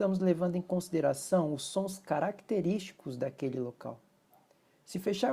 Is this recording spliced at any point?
no; 0 cuts

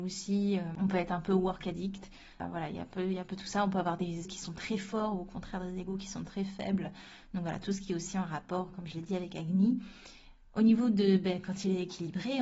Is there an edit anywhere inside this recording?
yes; 1 cut; at 4.3 s

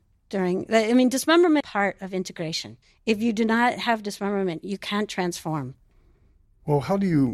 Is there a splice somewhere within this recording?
yes; 2 cuts; at 1.6 s, 2.8 s

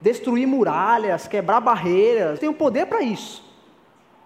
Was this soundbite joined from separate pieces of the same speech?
yes; 1 cut; at 2.4 s

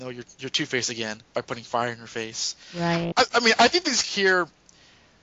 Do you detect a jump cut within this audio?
yes; 2 cuts; at 1.3 s, 4.0 s

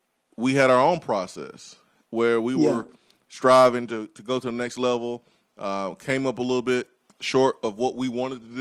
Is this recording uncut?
yes; 0 cuts

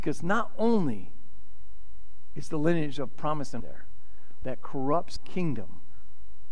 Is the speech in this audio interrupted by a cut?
yes; 3 cuts; at 3.6 s, 4.4 s, 5.2 s

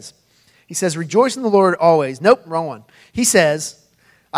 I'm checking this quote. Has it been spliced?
no; 0 cuts

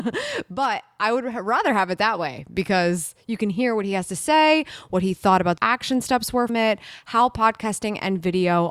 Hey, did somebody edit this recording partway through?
yes; 2 cuts; at 5.6 s, 6.5 s

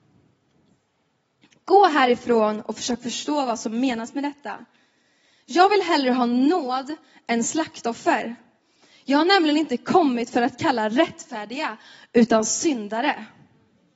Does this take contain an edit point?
no; 0 cuts

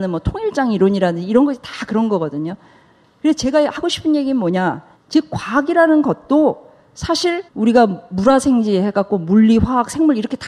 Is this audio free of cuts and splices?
no; 2 cuts; at 5.0 s, 7.5 s

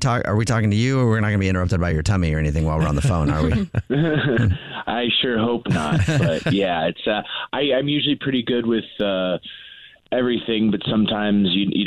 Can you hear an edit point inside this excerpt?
no; 0 cuts

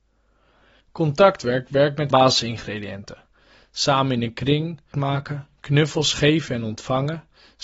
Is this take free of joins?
no; 2 cuts; at 2.1 s, 4.9 s

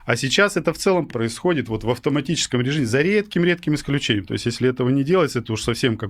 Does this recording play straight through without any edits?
no; 1 cut; at 1.1 s

